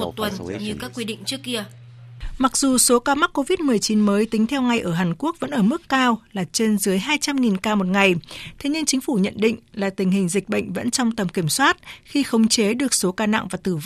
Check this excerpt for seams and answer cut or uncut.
uncut